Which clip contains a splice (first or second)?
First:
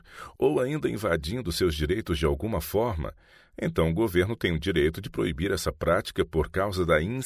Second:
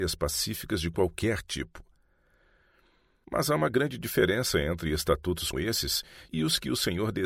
second